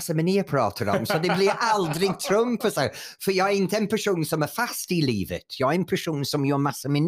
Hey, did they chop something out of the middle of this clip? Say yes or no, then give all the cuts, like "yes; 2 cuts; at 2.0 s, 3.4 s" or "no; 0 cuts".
no; 0 cuts